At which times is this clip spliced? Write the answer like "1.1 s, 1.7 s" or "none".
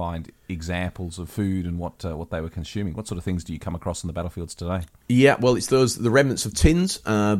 none